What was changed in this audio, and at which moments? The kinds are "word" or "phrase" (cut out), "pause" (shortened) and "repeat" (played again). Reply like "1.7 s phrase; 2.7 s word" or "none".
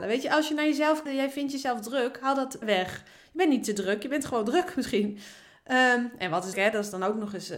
1.1 s word; 2.6 s word; 6.5 s word